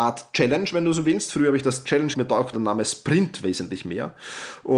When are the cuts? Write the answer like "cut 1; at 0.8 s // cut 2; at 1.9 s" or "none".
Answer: cut 1; at 2.1 s // cut 2; at 2.5 s